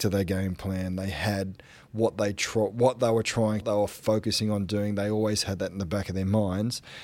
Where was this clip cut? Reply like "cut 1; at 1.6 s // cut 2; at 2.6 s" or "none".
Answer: cut 1; at 3.6 s

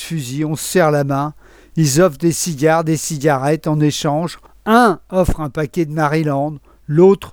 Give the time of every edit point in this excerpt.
none

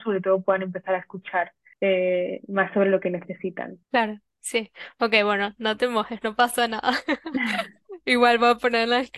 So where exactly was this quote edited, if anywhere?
cut 1; at 1.7 s // cut 2; at 3.8 s

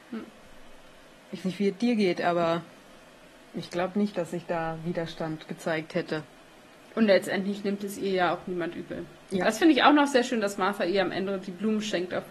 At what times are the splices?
cut 1; at 1.4 s

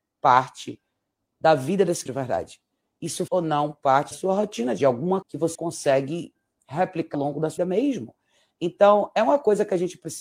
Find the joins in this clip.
cut 1; at 2.1 s // cut 2; at 3.3 s // cut 3; at 4.1 s // cut 4; at 4.8 s // cut 5; at 5.2 s // cut 6; at 5.5 s // cut 7; at 7.1 s // cut 8; at 7.6 s

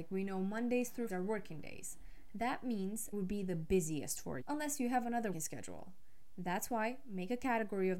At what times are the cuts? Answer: cut 1; at 1.1 s // cut 2; at 3.1 s // cut 3; at 4.4 s // cut 4; at 5.3 s

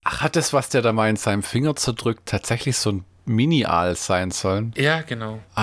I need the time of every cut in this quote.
none

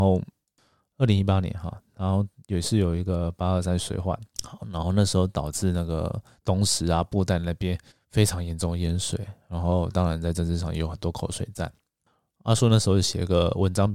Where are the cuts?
cut 1; at 4.3 s // cut 2; at 7.9 s

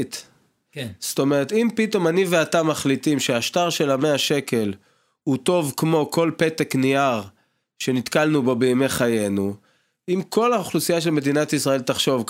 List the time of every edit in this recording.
none

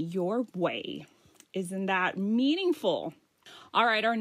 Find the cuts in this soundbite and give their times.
none

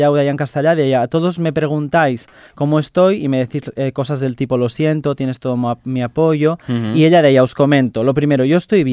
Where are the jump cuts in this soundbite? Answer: none

